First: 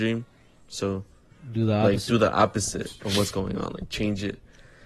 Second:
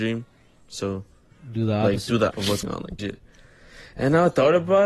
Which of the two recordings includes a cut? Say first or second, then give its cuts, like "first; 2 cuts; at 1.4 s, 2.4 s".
second; 3 cuts; at 2.3 s, 2.6 s, 3.0 s